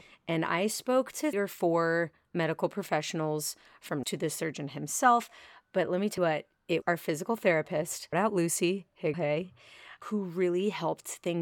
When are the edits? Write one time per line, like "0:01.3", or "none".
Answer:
0:01.3
0:04.0
0:06.2
0:06.8
0:08.1
0:09.1
0:10.0